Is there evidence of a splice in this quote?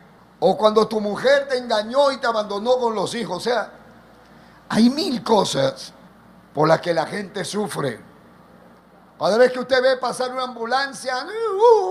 no; 0 cuts

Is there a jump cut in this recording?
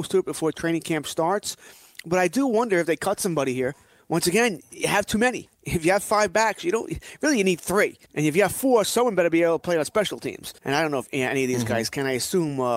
yes; 3 cuts; at 5.5 s, 8.1 s, 10.6 s

